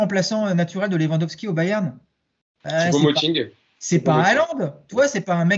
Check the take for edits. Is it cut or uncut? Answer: uncut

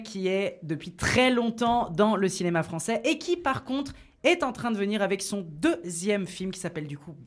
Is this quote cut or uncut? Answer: uncut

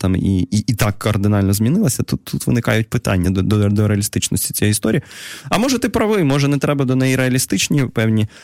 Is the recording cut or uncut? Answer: uncut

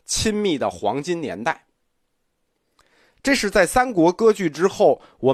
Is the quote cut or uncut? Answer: uncut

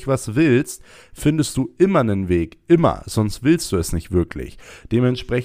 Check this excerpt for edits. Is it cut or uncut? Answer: uncut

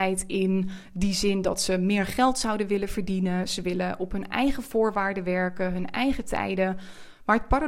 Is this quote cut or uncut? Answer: uncut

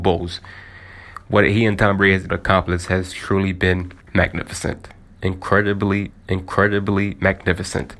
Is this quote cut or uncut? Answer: cut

